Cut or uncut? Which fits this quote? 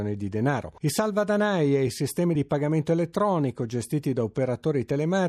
uncut